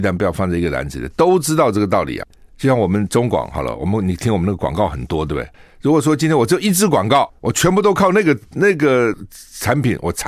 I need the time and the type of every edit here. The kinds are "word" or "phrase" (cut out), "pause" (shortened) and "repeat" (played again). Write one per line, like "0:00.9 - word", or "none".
0:07.4 - pause